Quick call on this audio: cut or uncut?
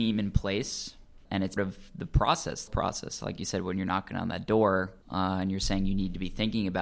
cut